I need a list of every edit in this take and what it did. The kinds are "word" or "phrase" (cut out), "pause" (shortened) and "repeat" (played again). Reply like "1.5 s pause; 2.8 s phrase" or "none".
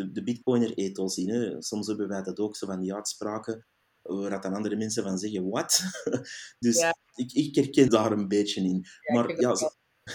7.9 s word